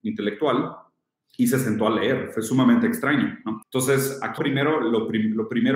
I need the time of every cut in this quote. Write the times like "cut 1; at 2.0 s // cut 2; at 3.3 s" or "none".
cut 1; at 3.6 s // cut 2; at 4.4 s